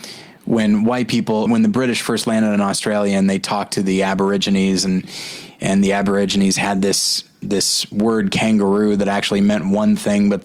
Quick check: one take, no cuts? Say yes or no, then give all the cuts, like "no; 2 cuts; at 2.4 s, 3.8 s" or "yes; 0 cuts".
no; 1 cut; at 1.5 s